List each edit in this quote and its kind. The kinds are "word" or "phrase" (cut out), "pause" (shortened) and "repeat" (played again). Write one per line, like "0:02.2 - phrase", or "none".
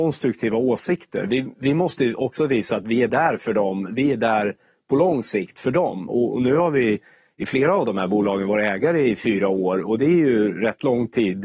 none

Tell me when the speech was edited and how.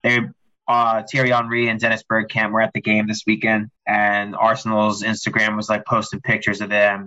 0:03.8 - pause

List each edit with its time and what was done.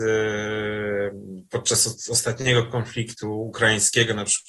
none

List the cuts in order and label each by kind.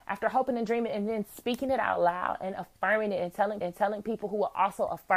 0:03.6 - repeat

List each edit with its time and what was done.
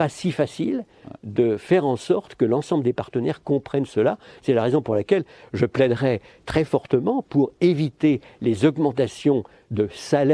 none

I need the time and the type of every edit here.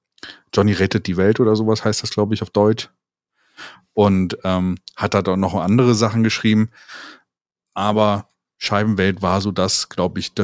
none

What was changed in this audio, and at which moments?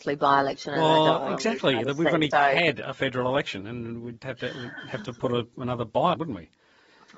0:02.3 - word
0:04.2 - word
0:06.1 - phrase

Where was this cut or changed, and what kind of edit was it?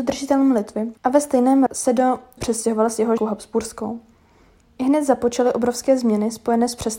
0:01.0 - pause
0:01.7 - word
0:02.4 - word
0:03.2 - phrase

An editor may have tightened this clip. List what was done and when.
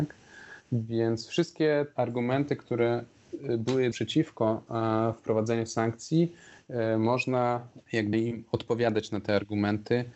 0:02.0 - word
0:03.9 - word
0:07.8 - word
0:08.1 - word

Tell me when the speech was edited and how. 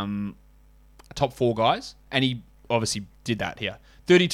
none

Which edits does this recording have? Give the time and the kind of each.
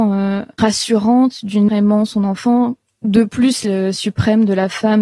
0:01.7 - word
0:03.6 - word

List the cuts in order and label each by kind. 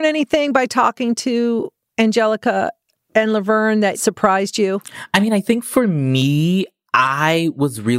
none

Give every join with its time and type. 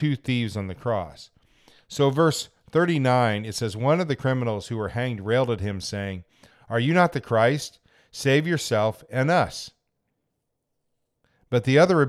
none

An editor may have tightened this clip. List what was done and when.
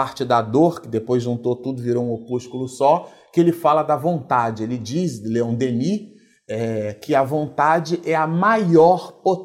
none

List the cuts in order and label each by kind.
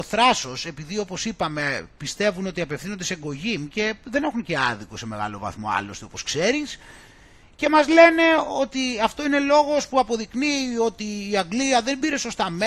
none

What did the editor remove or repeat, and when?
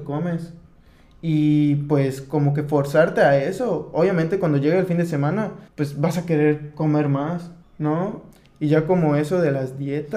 0:05.7 - pause
0:07.6 - pause

